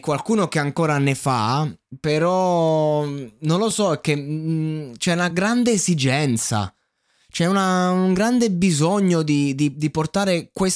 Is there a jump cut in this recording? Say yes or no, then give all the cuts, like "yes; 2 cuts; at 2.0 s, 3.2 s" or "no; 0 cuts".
no; 0 cuts